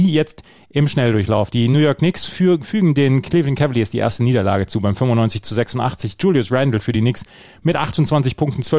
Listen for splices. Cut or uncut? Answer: uncut